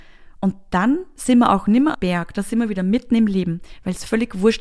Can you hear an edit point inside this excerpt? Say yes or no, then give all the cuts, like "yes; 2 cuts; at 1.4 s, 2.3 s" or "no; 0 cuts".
yes; 1 cut; at 1.9 s